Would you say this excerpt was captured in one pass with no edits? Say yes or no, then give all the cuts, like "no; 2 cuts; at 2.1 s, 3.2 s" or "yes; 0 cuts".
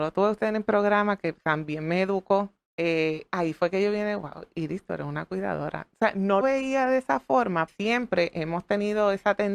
no; 3 cuts; at 2.7 s, 6.4 s, 7.7 s